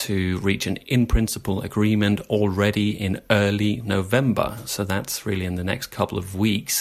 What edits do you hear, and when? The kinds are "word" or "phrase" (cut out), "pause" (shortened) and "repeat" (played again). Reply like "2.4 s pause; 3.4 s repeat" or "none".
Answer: none

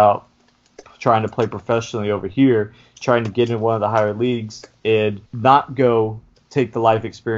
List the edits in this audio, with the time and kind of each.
5.3 s pause

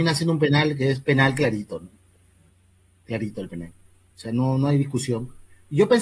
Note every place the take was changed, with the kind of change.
none

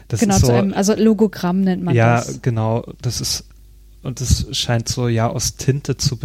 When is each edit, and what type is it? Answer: none

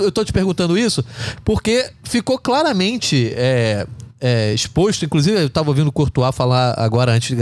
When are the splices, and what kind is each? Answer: none

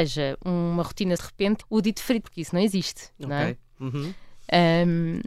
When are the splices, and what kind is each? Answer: 1.2 s word; 1.6 s word; 2.2 s word

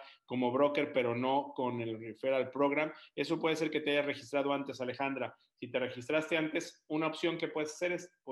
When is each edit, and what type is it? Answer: none

